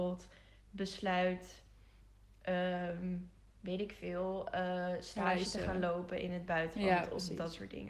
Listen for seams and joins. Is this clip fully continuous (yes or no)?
yes